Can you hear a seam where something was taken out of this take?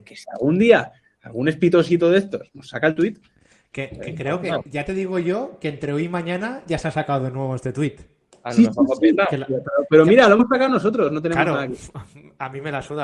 no; 0 cuts

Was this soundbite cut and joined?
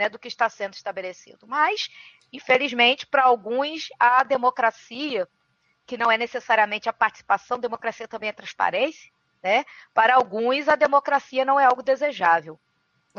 no; 0 cuts

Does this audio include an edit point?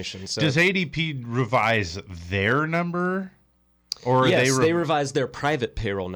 no; 0 cuts

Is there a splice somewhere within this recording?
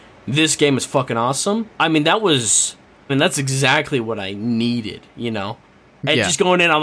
yes; 2 cuts; at 1.7 s, 3.1 s

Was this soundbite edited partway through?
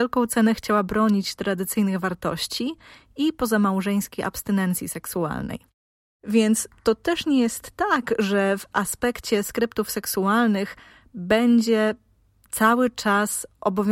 no; 0 cuts

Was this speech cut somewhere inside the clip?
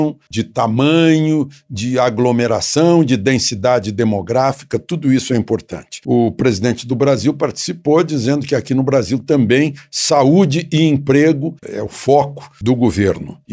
yes; 1 cut; at 11.6 s

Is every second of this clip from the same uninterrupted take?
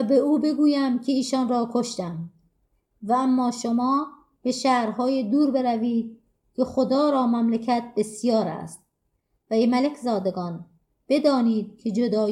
yes; 0 cuts

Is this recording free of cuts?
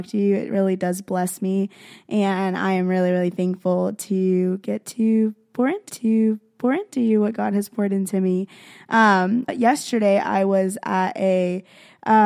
no; 2 cuts; at 5.9 s, 9.5 s

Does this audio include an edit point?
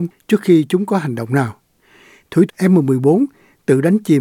yes; 1 cut; at 2.5 s

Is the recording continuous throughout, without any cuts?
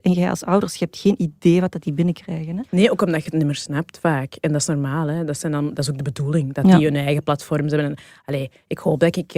no; 1 cut; at 2.7 s

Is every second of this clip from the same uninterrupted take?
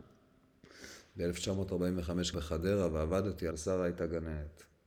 no; 2 cuts; at 2.3 s, 3.5 s

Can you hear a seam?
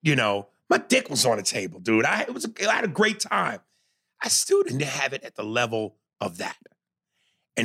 no; 0 cuts

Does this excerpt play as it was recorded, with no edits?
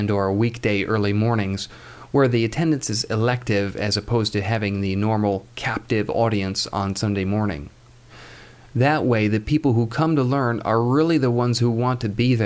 yes; 0 cuts

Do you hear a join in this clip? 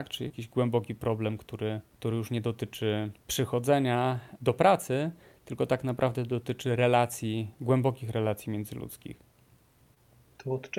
no; 0 cuts

